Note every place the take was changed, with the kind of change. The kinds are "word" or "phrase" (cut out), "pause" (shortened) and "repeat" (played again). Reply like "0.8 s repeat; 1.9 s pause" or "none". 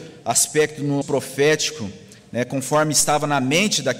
1.0 s word